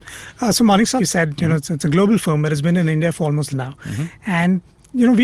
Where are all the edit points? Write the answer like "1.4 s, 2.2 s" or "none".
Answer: 1.0 s, 3.5 s